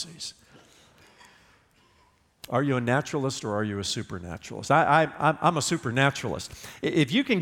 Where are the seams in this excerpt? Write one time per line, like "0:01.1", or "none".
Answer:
none